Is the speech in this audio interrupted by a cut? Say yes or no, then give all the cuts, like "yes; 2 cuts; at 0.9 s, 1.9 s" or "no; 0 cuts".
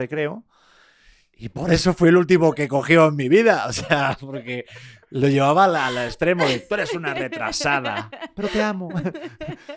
no; 0 cuts